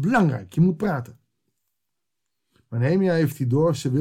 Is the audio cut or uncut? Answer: uncut